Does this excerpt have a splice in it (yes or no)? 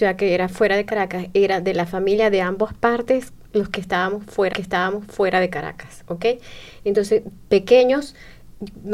yes